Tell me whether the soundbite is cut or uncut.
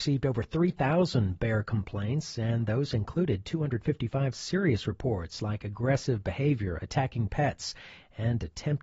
uncut